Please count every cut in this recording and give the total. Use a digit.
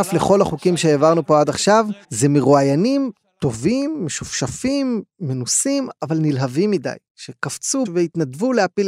2